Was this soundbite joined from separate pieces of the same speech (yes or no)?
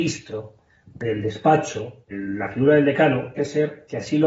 yes